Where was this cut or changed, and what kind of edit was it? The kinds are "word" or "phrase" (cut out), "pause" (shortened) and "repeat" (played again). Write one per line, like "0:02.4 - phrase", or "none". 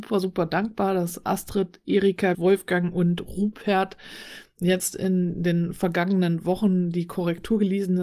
0:02.3 - word